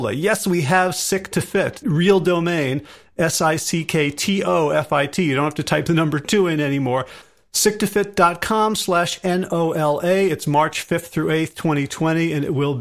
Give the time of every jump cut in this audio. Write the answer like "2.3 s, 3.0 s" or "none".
1.8 s

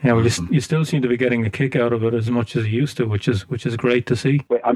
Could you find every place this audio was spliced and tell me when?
none

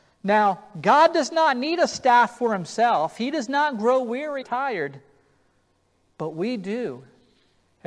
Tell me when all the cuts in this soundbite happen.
4.4 s

